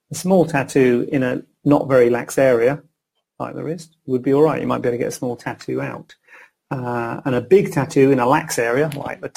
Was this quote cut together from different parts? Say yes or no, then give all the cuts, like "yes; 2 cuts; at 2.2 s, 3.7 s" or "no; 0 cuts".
no; 0 cuts